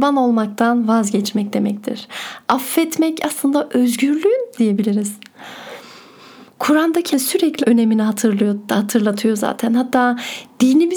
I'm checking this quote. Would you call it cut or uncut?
cut